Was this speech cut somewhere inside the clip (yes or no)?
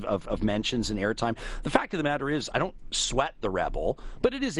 no